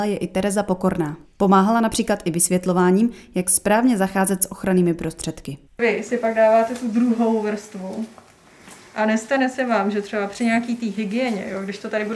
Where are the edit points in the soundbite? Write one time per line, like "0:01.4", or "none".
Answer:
0:01.2
0:05.7